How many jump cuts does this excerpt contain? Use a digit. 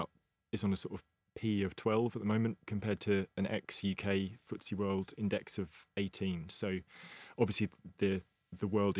0